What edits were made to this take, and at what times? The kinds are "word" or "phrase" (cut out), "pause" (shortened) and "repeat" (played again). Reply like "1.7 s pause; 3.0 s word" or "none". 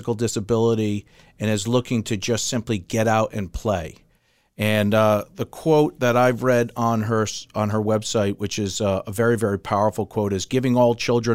none